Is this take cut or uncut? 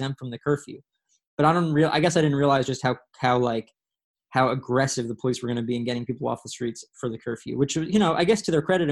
uncut